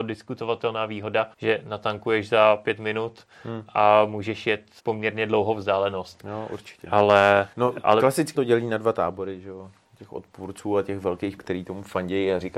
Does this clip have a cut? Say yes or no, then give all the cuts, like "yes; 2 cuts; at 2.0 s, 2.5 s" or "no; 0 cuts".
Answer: yes; 5 cuts; at 1.3 s, 4.8 s, 7.5 s, 8.3 s, 11.4 s